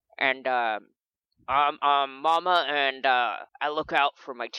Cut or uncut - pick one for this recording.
cut